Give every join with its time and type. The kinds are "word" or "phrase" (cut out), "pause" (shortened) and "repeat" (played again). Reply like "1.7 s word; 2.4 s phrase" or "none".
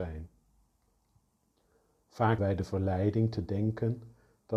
2.4 s word